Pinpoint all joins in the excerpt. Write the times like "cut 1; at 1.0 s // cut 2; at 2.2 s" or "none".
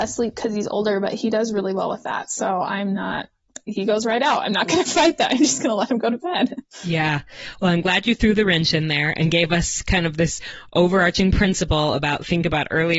none

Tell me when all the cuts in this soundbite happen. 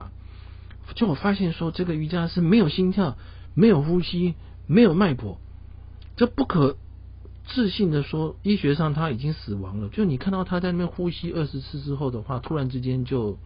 none

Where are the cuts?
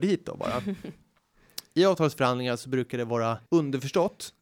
cut 1; at 3.5 s

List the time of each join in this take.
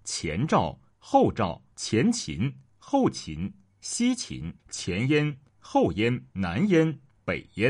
cut 1; at 1.7 s // cut 2; at 4.6 s // cut 3; at 6.3 s

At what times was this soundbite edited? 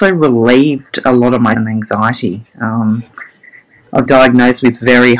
cut 1; at 1.5 s // cut 2; at 4.1 s

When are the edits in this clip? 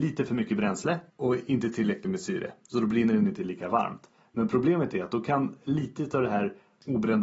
cut 1; at 1.1 s

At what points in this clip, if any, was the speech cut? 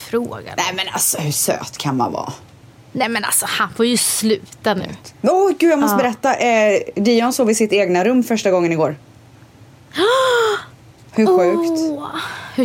none

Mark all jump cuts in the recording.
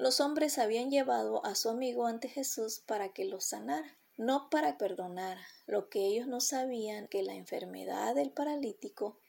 cut 1; at 4.1 s // cut 2; at 4.8 s // cut 3; at 5.6 s // cut 4; at 7.1 s

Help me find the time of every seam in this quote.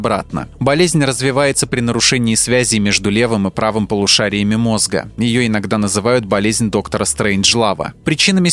none

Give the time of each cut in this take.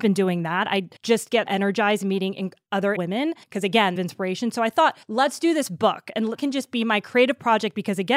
cut 1; at 1.0 s // cut 2; at 1.5 s // cut 3; at 3.0 s // cut 4; at 3.4 s // cut 5; at 4.0 s // cut 6; at 5.0 s // cut 7; at 6.4 s

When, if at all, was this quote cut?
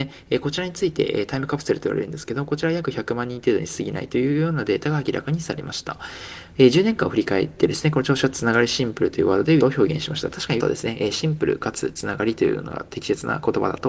cut 1; at 6.5 s // cut 2; at 9.6 s // cut 3; at 10.6 s

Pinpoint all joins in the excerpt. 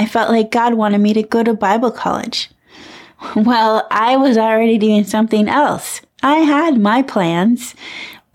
none

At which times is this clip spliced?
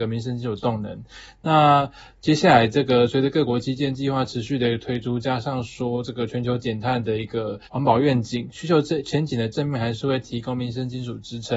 cut 1; at 7.6 s

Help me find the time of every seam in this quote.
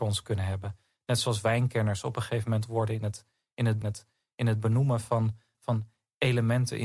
cut 1; at 2.7 s // cut 2; at 3.8 s // cut 3; at 5.5 s

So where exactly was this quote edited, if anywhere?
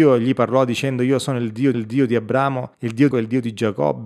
cut 1; at 1.7 s // cut 2; at 2.7 s // cut 3; at 3.1 s

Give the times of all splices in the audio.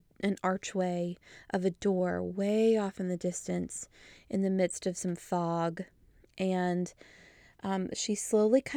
none

